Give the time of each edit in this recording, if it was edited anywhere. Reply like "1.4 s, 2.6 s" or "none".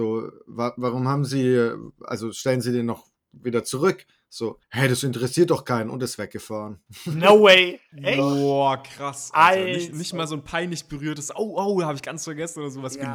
4.6 s